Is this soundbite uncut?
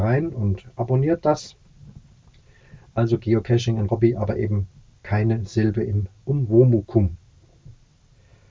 no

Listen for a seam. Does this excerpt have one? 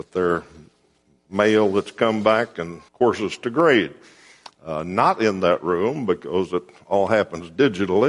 yes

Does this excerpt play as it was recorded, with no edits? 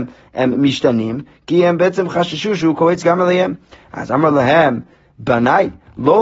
yes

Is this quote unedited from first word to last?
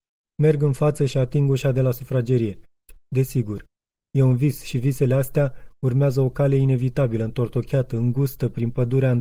yes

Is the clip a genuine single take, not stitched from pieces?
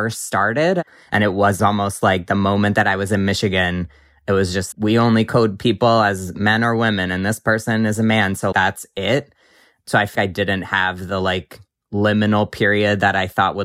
no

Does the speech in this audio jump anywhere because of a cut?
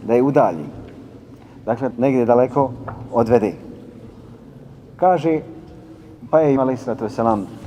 yes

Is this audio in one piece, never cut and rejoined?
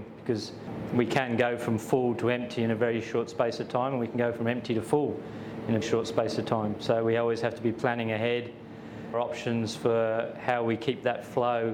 no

